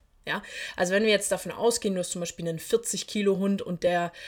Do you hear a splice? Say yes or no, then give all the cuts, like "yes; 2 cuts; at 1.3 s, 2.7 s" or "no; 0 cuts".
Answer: no; 0 cuts